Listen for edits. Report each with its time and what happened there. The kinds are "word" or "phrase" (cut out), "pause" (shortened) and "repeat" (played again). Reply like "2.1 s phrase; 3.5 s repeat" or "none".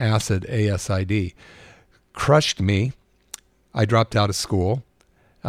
none